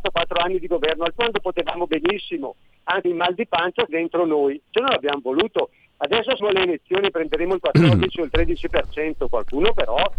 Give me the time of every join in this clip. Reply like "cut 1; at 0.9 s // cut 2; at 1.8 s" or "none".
cut 1; at 1.2 s // cut 2; at 3.0 s // cut 3; at 3.9 s // cut 4; at 4.7 s // cut 5; at 6.4 s